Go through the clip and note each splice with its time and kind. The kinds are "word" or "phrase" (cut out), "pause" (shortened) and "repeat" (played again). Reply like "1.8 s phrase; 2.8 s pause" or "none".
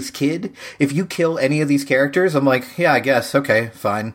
none